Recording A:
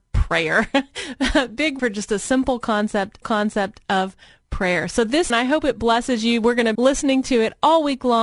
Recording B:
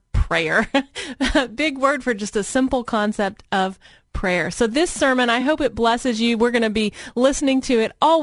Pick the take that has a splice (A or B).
A